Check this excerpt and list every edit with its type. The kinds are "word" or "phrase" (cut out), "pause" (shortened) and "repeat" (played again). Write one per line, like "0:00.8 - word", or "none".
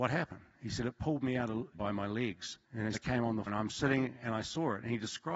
0:01.7 - word
0:02.6 - pause
0:02.9 - word
0:03.5 - word